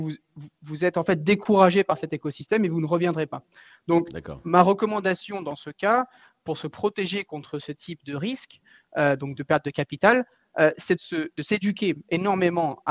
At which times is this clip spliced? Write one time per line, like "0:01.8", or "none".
none